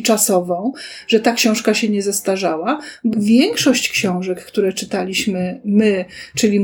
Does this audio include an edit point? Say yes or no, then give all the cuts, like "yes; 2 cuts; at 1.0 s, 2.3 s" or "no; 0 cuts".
yes; 1 cut; at 3.1 s